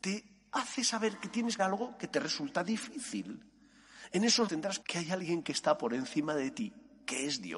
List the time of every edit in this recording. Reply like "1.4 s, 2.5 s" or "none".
1.6 s, 4.5 s, 4.8 s